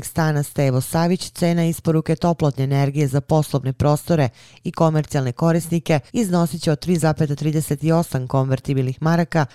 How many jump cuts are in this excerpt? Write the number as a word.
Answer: one